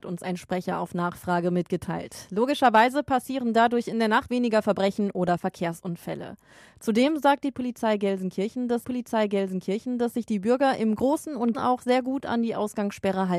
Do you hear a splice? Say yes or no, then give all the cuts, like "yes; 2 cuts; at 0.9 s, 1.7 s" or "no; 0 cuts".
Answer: yes; 3 cuts; at 4.3 s, 8.8 s, 11.5 s